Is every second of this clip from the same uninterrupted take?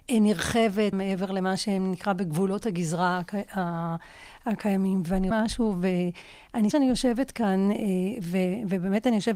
no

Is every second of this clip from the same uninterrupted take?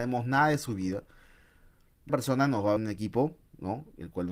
no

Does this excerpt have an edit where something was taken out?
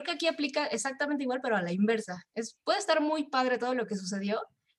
no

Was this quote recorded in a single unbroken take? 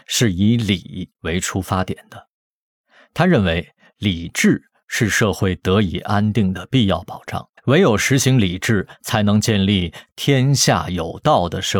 no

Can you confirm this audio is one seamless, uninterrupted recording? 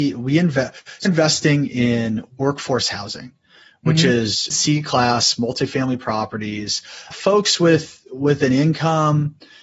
no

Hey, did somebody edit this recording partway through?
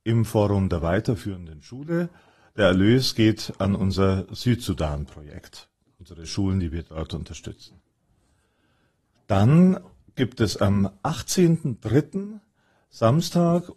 no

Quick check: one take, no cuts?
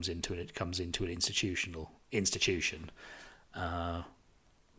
yes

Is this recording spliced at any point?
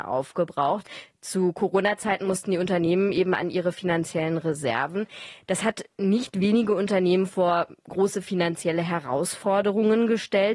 no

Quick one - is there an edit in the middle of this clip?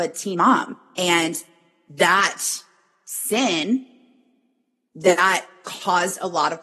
no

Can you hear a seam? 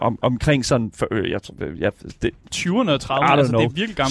no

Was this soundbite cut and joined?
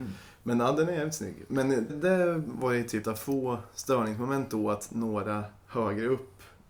yes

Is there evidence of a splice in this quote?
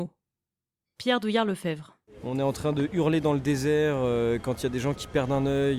no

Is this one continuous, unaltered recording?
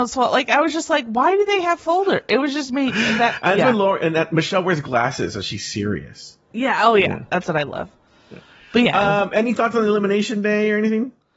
yes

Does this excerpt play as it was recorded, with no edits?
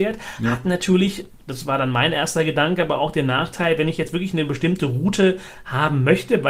yes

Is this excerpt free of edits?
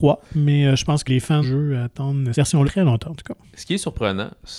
no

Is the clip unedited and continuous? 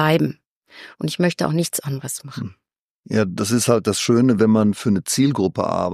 yes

